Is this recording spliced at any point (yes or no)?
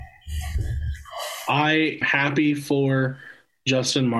yes